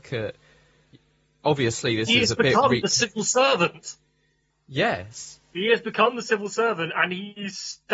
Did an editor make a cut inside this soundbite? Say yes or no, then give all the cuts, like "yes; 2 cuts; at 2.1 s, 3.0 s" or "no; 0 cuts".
no; 0 cuts